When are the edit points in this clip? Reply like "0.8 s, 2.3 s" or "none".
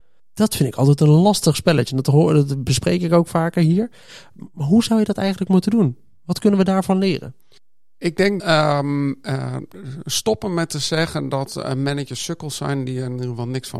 8.4 s